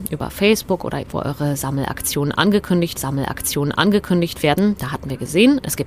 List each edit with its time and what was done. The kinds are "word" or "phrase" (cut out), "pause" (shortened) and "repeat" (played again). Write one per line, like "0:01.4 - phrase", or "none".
0:01.0 - word
0:03.0 - repeat

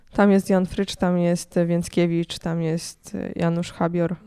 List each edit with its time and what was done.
none

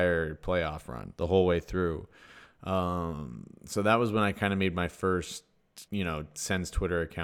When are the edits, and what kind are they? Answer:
0:01.1 - pause
0:05.9 - pause

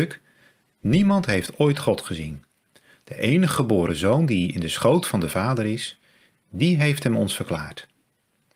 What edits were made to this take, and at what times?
none

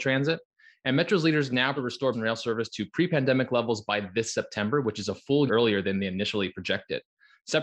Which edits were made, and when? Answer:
0:01.8 - phrase
0:02.1 - word
0:05.5 - word

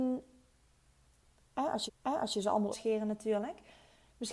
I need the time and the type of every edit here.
0:01.9 - repeat
0:02.7 - phrase

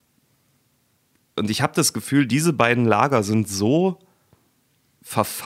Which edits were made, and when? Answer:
none

